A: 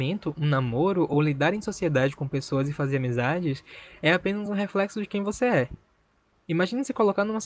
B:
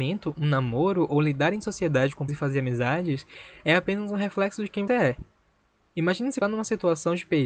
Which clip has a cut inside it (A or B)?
B